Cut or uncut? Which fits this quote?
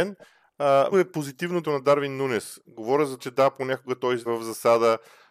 cut